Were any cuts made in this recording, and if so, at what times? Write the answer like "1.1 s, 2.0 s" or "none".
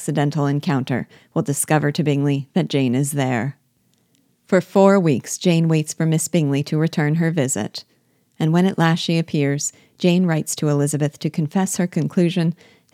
none